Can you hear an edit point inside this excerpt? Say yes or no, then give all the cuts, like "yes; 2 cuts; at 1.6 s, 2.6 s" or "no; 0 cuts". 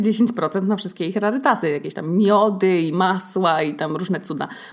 no; 0 cuts